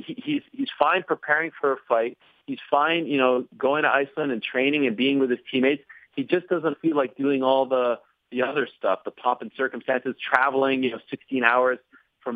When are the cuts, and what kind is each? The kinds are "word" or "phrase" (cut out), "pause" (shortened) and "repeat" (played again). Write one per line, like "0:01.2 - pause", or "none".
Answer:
none